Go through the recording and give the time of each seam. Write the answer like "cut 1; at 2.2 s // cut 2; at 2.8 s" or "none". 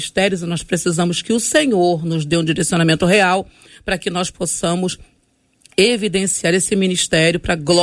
none